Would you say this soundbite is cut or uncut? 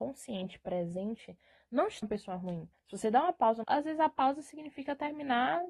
cut